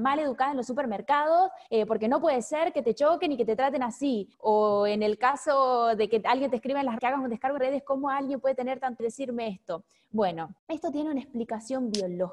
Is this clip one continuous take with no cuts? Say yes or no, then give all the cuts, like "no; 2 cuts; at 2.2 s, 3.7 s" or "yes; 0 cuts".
no; 6 cuts; at 1.7 s, 4.3 s, 7.0 s, 7.6 s, 9.0 s, 10.6 s